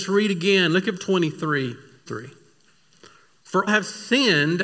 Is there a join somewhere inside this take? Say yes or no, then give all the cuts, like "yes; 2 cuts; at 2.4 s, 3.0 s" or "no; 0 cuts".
yes; 3 cuts; at 1.0 s, 2.1 s, 3.7 s